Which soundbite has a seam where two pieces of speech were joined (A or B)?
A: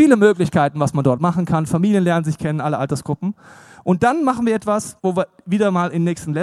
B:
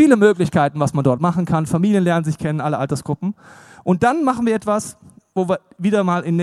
A